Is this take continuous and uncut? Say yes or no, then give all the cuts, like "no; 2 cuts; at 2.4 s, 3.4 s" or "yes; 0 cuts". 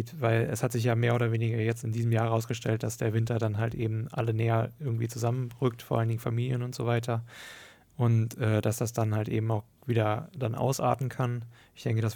yes; 0 cuts